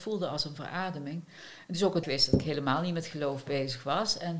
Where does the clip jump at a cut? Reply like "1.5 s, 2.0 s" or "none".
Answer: 2.0 s